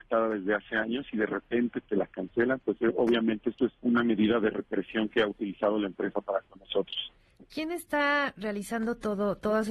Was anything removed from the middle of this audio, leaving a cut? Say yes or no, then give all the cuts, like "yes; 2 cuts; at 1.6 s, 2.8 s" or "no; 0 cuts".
yes; 1 cut; at 3.8 s